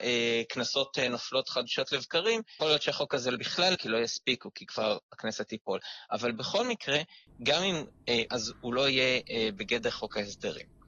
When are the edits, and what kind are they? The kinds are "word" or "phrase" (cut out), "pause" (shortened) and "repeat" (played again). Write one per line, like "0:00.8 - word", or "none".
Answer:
0:02.6 - word
0:03.3 - word
0:03.7 - word
0:08.3 - phrase